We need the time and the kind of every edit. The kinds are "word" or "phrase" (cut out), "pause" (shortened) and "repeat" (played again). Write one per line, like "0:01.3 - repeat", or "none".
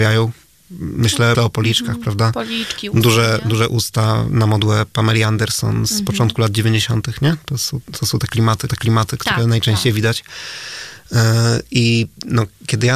0:01.3 - word
0:08.7 - repeat